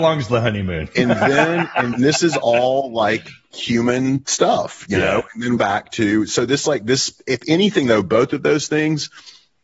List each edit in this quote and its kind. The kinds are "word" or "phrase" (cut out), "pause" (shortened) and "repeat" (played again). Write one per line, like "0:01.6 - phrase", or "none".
0:01.9 - word
0:05.6 - phrase